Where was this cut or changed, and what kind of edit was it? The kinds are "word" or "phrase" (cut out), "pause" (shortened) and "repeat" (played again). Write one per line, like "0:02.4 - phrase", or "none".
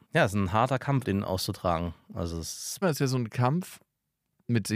0:01.0 - word
0:02.8 - phrase